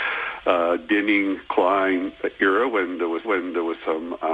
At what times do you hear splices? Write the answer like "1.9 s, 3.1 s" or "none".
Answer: 3.2 s

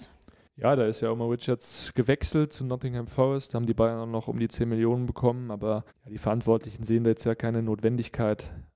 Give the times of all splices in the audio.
5.9 s

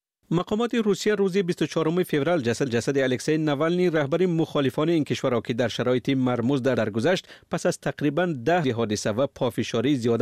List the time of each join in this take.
2.7 s, 6.8 s, 8.6 s

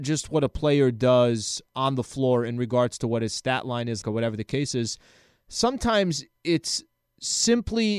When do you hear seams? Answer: 4.0 s

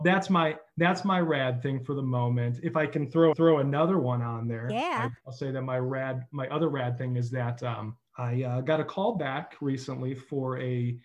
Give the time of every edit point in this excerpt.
3.3 s, 5.2 s, 8.1 s

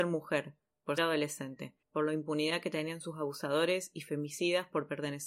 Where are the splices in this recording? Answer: 1.0 s, 1.8 s

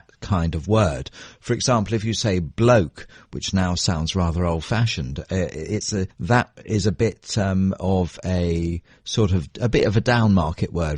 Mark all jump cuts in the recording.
6.1 s

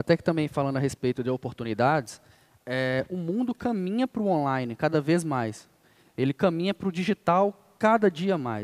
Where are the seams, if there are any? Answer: none

